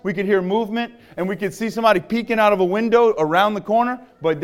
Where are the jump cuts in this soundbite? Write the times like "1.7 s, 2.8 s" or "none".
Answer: none